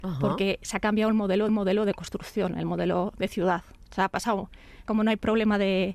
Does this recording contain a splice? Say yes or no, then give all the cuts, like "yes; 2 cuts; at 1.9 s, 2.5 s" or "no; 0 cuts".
yes; 2 cuts; at 1.5 s, 4.9 s